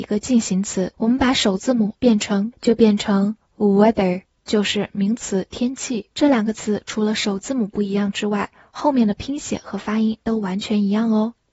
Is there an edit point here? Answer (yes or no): yes